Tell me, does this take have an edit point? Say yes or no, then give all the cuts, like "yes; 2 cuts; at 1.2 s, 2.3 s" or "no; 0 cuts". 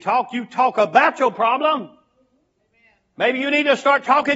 no; 0 cuts